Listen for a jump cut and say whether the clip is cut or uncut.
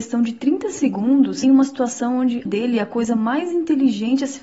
cut